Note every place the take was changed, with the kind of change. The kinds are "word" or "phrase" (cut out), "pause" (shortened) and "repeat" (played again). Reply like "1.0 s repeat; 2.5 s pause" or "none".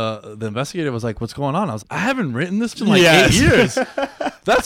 1.8 s word; 2.7 s word

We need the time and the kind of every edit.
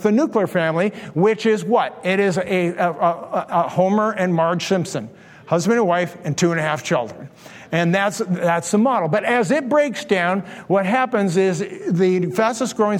none

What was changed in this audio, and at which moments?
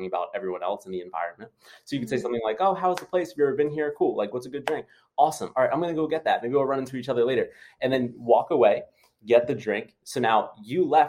none

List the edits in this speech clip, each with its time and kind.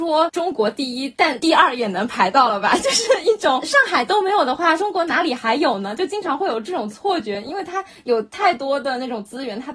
none

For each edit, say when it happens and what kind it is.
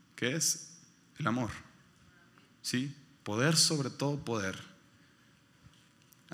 none

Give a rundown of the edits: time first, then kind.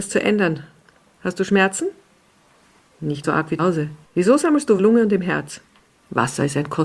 3.2 s word; 3.6 s word; 4.0 s pause; 4.8 s phrase; 5.8 s pause

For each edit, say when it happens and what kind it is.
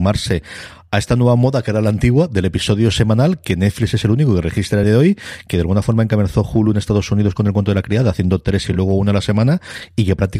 4.8 s word; 8.7 s word

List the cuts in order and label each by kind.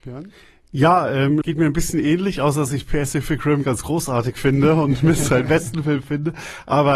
1.4 s word; 3.6 s word

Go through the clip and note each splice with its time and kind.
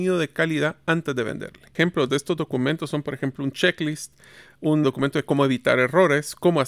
4.8 s word

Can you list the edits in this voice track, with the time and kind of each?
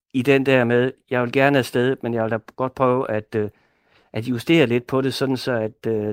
none

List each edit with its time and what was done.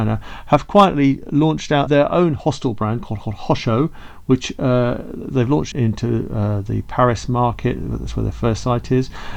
1.9 s word; 3.2 s repeat; 5.7 s word

